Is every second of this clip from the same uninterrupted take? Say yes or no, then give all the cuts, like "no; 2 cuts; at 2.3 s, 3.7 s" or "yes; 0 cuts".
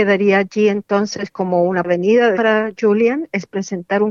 no; 2 cuts; at 1.8 s, 2.3 s